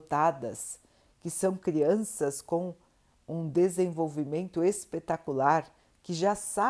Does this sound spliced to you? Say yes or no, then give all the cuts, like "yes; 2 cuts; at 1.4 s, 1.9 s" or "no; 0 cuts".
no; 0 cuts